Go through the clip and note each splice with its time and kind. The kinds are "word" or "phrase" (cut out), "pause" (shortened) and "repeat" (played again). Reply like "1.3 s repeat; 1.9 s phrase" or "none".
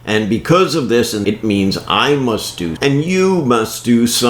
1.2 s word; 2.8 s word